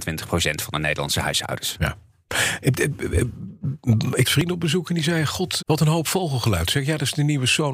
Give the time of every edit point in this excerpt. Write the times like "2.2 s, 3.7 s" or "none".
4.2 s, 5.6 s